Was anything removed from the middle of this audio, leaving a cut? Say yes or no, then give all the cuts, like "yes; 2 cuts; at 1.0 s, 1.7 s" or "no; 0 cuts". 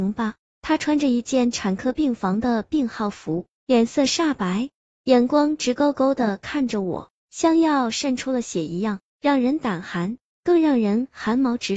no; 0 cuts